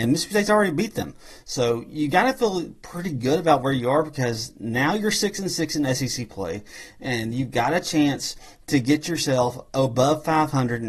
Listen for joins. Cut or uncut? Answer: uncut